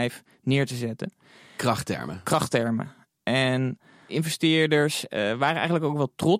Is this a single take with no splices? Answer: no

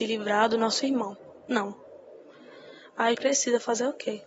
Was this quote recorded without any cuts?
no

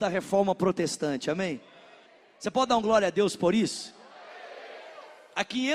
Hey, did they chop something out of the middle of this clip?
no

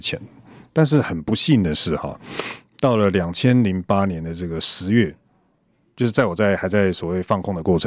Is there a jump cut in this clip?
no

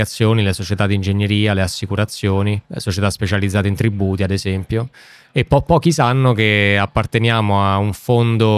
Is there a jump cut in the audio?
yes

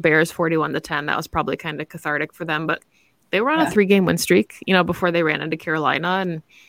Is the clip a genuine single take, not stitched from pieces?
yes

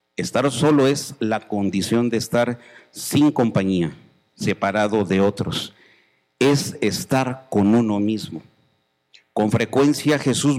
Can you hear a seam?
no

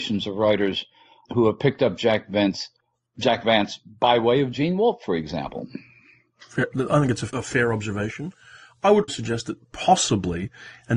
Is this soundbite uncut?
no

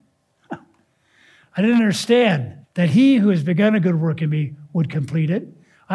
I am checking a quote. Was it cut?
yes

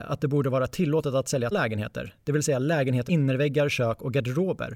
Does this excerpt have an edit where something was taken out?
yes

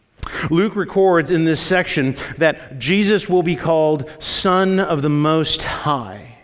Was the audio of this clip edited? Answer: no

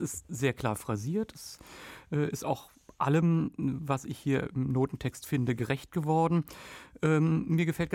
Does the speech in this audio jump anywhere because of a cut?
no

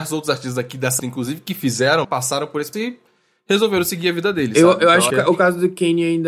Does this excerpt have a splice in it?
yes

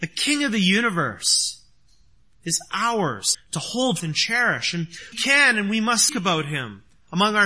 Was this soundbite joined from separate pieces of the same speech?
yes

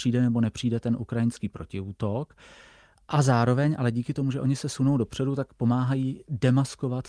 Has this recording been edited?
no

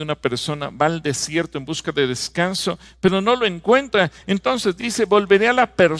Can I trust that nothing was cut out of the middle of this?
yes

